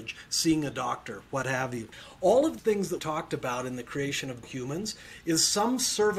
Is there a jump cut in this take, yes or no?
yes